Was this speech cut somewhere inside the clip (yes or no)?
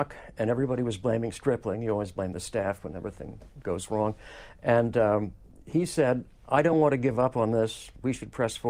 no